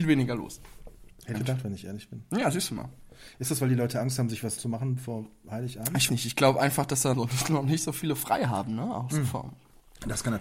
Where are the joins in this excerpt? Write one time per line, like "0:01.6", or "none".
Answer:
0:01.3
0:04.6
0:06.1
0:07.1